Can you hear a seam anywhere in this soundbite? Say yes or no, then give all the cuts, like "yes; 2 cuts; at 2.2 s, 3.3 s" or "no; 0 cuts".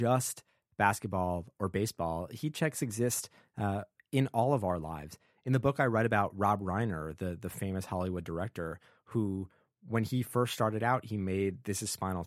no; 0 cuts